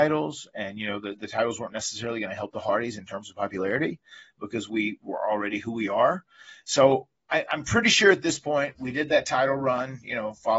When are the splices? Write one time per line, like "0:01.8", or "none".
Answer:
none